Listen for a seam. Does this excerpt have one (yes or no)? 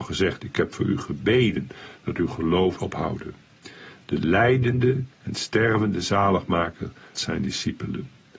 yes